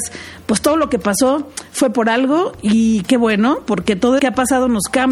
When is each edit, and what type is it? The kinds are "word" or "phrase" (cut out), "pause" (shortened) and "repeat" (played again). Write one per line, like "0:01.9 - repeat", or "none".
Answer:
0:04.2 - word